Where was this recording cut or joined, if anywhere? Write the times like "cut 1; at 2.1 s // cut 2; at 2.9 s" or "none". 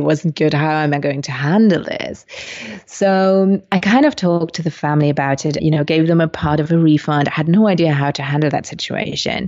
cut 1; at 5.6 s